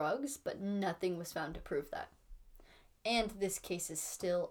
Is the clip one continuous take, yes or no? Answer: yes